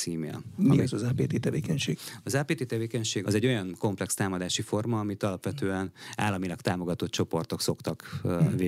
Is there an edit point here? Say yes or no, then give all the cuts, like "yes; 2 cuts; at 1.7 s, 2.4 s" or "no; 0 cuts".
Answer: yes; 1 cut; at 3.2 s